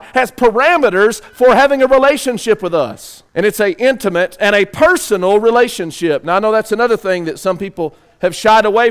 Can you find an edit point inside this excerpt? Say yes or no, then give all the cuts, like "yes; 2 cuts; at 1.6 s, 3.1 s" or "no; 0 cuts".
yes; 1 cut; at 3.3 s